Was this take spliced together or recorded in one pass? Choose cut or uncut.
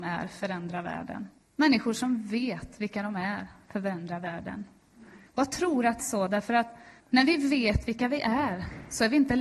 cut